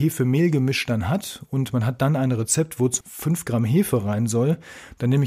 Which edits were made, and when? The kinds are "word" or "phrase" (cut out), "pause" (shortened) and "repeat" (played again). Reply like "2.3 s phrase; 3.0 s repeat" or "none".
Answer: 3.0 s word